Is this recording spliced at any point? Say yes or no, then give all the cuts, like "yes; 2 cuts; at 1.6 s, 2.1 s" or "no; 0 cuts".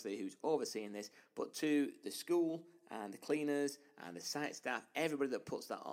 no; 0 cuts